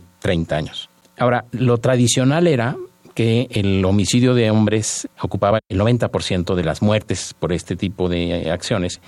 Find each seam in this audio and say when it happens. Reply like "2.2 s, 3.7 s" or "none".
none